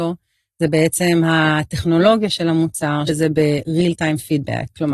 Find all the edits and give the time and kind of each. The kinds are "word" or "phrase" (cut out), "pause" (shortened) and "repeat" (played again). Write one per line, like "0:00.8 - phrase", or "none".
0:03.1 - word